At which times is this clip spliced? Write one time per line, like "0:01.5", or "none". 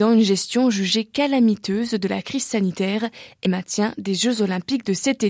0:03.5